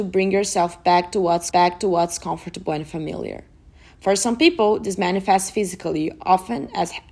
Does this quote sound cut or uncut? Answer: cut